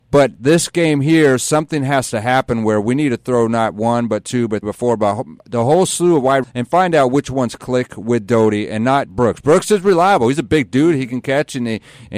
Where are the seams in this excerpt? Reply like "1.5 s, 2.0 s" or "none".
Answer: 4.6 s, 6.4 s, 9.0 s